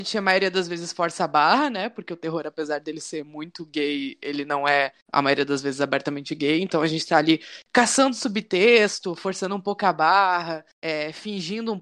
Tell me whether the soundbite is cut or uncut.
cut